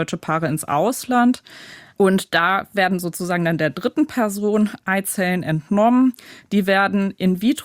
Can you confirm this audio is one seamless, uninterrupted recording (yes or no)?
yes